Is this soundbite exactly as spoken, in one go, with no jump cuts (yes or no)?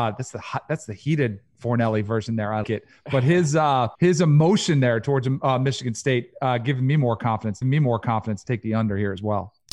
no